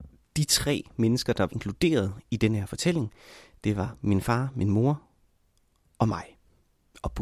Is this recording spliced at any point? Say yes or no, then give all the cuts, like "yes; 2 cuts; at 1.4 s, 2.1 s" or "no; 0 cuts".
yes; 1 cut; at 1.5 s